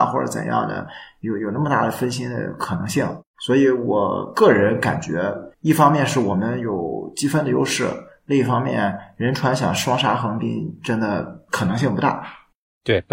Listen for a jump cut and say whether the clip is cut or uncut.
cut